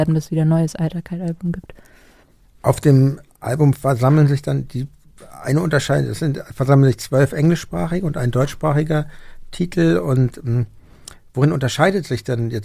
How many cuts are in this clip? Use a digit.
0